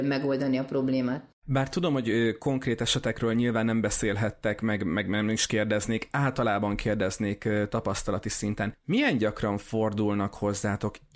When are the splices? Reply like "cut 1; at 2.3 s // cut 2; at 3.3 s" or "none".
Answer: cut 1; at 1.3 s